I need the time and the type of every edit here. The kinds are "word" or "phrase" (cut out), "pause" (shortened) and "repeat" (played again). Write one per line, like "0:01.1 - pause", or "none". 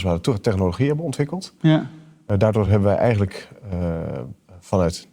none